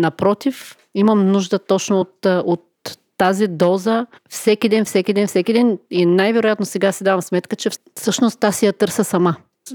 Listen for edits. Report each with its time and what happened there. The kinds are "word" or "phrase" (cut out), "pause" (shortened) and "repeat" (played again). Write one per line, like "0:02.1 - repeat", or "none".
none